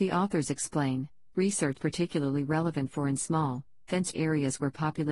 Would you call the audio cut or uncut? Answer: cut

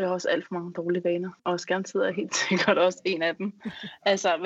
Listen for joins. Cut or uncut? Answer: cut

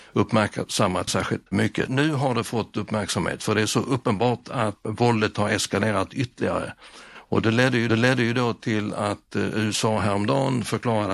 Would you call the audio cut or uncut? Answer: cut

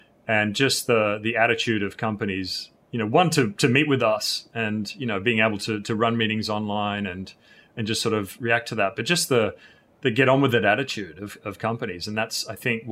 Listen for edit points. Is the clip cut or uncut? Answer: uncut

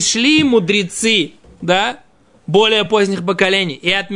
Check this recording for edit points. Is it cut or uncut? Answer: uncut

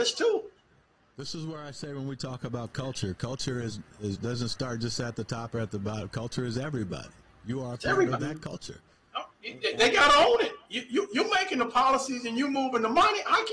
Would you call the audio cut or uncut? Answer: uncut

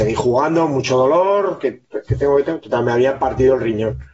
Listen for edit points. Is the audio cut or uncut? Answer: uncut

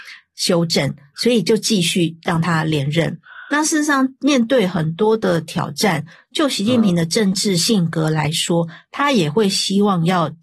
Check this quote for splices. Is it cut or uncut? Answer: cut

